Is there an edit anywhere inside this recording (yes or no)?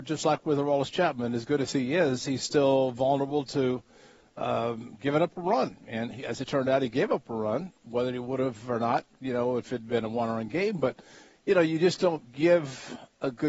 no